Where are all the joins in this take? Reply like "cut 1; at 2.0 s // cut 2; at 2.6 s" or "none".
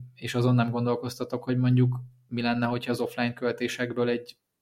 none